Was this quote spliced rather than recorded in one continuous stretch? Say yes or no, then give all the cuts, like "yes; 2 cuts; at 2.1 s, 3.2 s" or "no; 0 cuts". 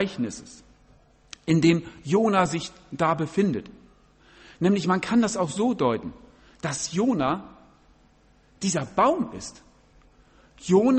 no; 0 cuts